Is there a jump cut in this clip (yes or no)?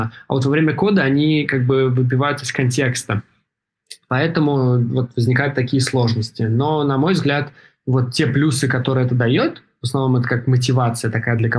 no